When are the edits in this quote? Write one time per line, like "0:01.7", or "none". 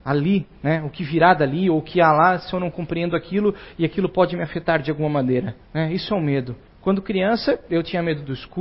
0:05.6
0:06.7